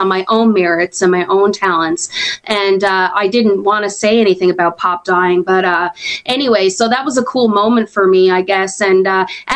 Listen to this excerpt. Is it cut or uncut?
uncut